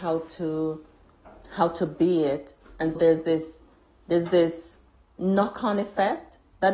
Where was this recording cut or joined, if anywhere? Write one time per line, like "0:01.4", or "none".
0:03.0